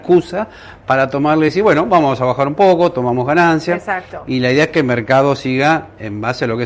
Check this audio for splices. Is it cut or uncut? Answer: uncut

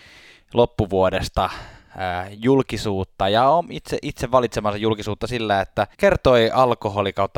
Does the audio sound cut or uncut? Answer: cut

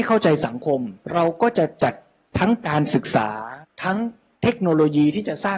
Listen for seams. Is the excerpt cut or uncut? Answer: cut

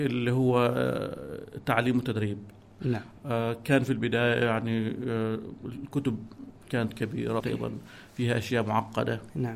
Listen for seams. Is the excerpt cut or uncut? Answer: cut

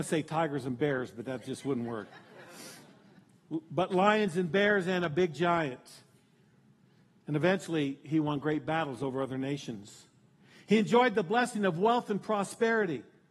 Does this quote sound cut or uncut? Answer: uncut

